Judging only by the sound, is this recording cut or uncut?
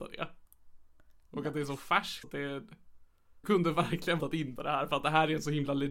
cut